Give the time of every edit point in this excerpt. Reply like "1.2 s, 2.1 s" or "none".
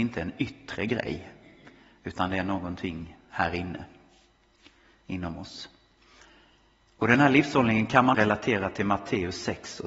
8.1 s